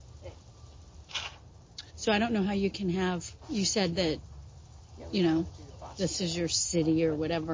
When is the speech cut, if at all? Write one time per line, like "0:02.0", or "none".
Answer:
0:01.9
0:03.4

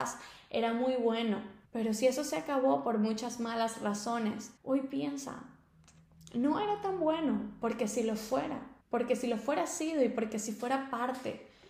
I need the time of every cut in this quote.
0:01.6
0:04.6
0:08.8

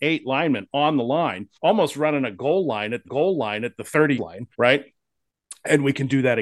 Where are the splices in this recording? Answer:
0:01.5
0:03.0
0:04.2
0:04.5

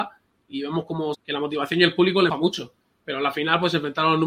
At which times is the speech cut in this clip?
0:01.1
0:02.3

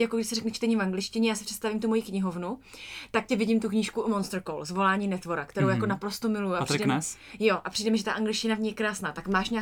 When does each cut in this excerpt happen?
0:03.3

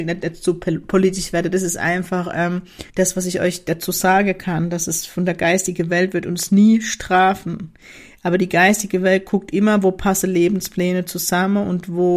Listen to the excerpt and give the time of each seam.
0:02.9

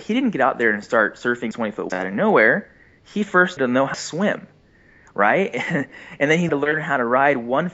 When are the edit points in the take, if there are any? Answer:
0:01.5
0:01.9
0:03.6
0:03.9
0:06.5

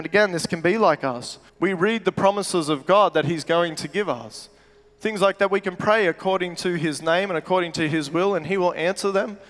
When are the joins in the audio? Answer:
0:01.5

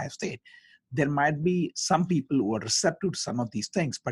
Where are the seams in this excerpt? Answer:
none

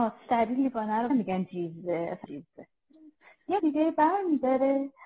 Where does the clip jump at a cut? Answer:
0:01.1
0:02.2
0:03.6

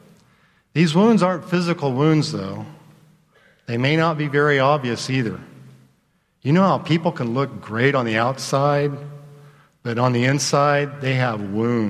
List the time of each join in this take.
none

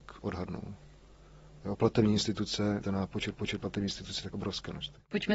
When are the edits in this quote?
0:02.8
0:03.3
0:04.3

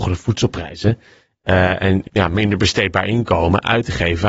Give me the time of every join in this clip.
0:02.1

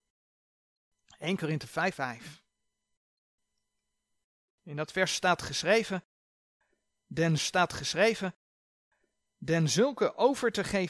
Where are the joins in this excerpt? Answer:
0:01.9
0:07.4

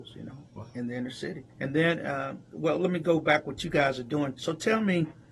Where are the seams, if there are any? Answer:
0:01.5
0:02.4

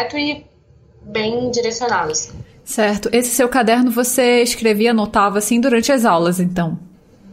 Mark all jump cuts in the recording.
none

